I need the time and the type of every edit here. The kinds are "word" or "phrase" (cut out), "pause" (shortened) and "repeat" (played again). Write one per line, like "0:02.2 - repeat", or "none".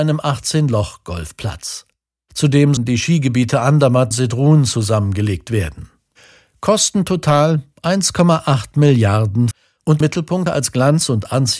0:02.8 - word
0:04.1 - word
0:09.5 - word
0:10.0 - word
0:10.5 - word